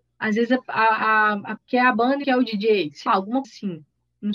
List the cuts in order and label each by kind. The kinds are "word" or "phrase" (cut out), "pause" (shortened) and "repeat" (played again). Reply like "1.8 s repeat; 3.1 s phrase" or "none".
1.6 s word; 2.2 s phrase; 3.1 s word; 3.4 s word

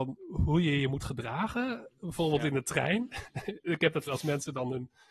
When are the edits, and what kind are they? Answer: 4.1 s word

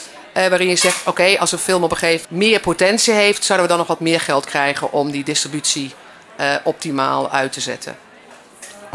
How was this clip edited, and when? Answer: 2.2 s word; 4.5 s word

